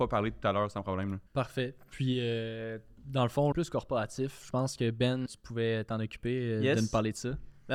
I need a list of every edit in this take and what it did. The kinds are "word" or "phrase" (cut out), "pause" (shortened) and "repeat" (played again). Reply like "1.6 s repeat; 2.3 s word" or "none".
1.3 s pause; 3.5 s phrase; 5.3 s word